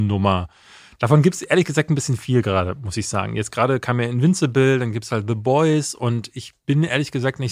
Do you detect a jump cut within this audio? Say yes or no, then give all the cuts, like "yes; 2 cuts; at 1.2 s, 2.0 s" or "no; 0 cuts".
no; 0 cuts